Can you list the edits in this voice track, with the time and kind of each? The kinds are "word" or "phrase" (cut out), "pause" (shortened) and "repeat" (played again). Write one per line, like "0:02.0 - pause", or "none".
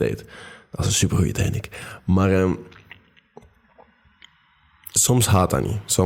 none